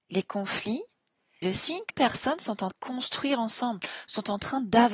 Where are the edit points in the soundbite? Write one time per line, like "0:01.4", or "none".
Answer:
0:01.4
0:01.9
0:02.7